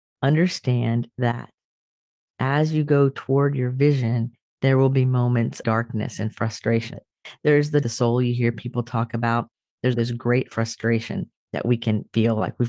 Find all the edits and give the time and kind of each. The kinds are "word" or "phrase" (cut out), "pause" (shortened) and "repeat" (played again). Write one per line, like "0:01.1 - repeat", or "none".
0:05.6 - word
0:06.9 - phrase
0:07.8 - phrase
0:09.9 - word